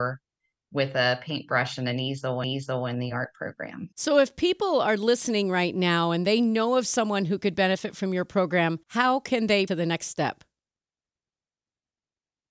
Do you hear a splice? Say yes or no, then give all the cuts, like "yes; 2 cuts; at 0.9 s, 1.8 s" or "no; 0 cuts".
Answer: yes; 4 cuts; at 2.4 s, 3.9 s, 8.8 s, 9.7 s